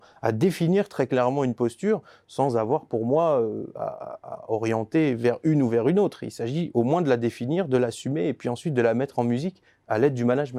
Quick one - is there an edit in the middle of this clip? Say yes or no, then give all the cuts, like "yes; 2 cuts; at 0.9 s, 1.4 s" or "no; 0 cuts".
no; 0 cuts